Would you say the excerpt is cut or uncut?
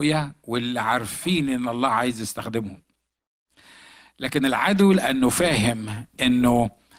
uncut